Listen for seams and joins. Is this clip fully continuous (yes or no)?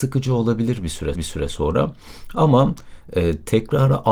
no